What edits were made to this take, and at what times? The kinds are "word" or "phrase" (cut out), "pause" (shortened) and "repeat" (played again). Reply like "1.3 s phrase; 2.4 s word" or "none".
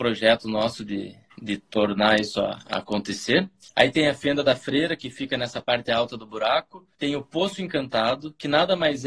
3.7 s pause; 6.9 s pause